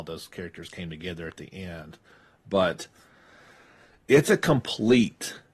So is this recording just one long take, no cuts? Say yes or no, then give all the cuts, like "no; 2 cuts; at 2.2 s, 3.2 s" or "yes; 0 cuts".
yes; 0 cuts